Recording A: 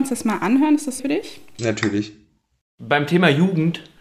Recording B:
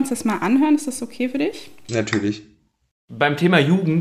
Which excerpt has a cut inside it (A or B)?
A